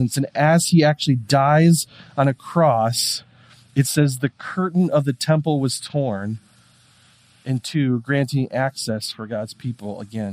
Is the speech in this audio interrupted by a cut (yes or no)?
no